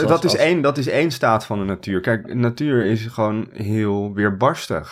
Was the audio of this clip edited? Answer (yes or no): no